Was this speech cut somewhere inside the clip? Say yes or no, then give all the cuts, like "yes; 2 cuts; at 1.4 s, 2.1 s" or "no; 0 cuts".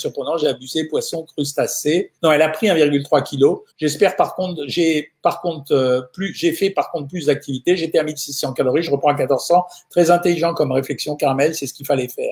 yes; 2 cuts; at 2.2 s, 3.7 s